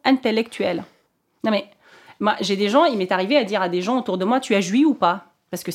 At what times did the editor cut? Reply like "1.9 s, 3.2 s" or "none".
none